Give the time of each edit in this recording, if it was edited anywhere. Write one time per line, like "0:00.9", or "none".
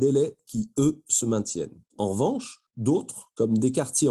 0:01.9